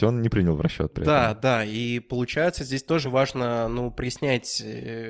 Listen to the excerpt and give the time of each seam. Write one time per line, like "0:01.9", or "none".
0:03.0